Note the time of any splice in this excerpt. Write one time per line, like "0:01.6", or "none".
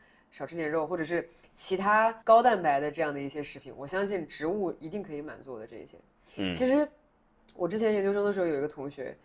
0:02.2